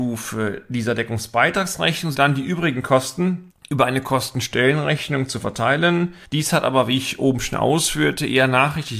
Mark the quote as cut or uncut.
cut